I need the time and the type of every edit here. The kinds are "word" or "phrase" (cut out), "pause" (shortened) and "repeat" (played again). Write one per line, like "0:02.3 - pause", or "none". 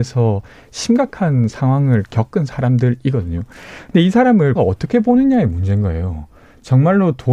0:04.6 - word